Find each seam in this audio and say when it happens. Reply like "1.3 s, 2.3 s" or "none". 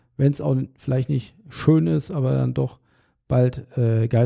none